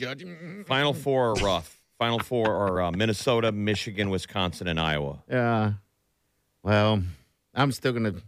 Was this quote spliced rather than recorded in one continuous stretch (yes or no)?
no